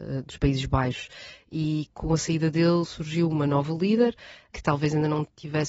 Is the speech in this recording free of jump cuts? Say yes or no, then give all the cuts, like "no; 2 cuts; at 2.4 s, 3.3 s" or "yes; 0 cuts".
yes; 0 cuts